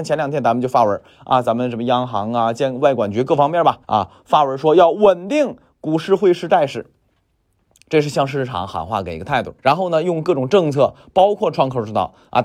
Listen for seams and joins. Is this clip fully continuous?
no; 2 cuts; at 3.8 s, 9.6 s

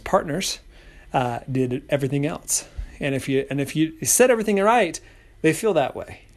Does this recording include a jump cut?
no; 0 cuts

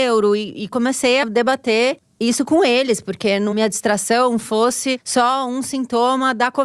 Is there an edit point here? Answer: yes; 2 cuts; at 1.2 s, 3.5 s

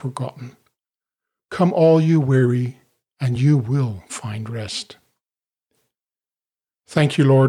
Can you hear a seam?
no; 0 cuts

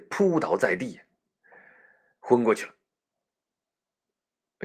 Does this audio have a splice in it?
no; 0 cuts

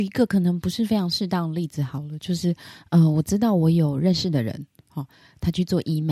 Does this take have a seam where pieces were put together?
no; 0 cuts

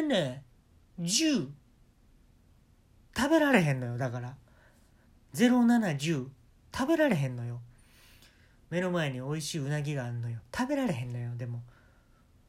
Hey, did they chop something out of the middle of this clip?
no; 0 cuts

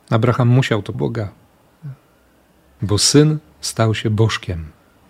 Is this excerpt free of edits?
no; 1 cut; at 0.9 s

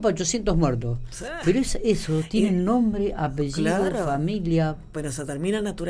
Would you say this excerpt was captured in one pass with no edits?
yes; 0 cuts

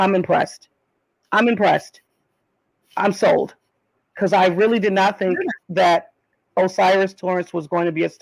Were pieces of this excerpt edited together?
no; 0 cuts

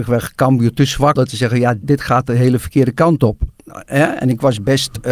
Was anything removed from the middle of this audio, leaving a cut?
yes; 2 cuts; at 1.2 s, 1.8 s

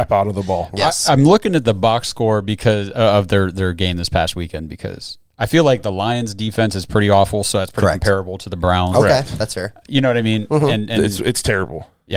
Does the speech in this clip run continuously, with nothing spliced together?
yes; 0 cuts

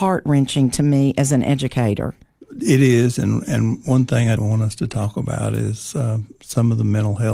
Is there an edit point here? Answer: yes; 1 cut; at 4.4 s

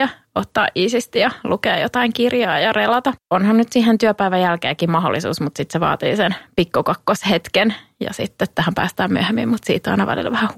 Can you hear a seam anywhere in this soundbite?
no; 0 cuts

